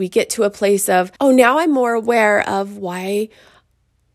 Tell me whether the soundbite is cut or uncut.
cut